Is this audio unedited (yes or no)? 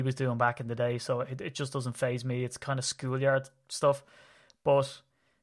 yes